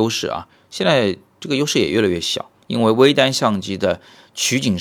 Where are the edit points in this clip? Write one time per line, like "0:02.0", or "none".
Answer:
none